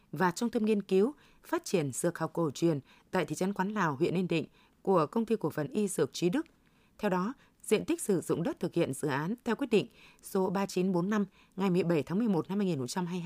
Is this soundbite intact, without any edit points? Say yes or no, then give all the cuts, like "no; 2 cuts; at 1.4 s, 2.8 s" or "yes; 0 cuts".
yes; 0 cuts